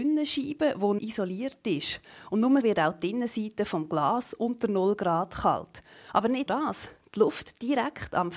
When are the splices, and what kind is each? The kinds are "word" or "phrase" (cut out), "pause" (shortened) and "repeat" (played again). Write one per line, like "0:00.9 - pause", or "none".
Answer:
0:01.0 - word
0:02.6 - word
0:06.5 - word